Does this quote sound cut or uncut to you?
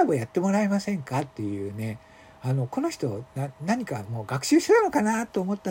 uncut